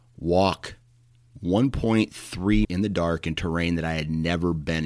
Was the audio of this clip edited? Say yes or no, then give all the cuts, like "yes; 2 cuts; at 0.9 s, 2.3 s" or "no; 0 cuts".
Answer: yes; 1 cut; at 2.6 s